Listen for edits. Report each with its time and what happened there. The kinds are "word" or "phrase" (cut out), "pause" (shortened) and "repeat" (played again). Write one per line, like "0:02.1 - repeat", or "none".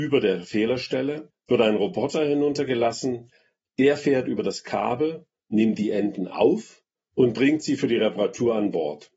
none